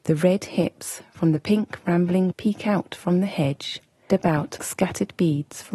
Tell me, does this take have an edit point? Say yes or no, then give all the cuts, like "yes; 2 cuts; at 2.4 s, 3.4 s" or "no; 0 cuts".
yes; 3 cuts; at 2.3 s, 4.1 s, 4.6 s